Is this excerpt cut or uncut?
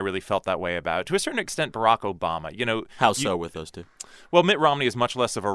uncut